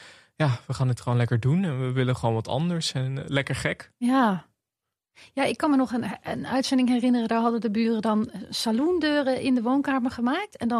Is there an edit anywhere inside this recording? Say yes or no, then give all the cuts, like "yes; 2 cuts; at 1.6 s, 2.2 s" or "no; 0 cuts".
no; 0 cuts